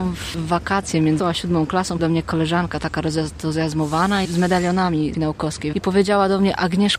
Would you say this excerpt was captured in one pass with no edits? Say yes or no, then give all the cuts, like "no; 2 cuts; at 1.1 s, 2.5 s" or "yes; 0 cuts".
no; 5 cuts; at 1.2 s, 2.0 s, 4.3 s, 5.1 s, 5.7 s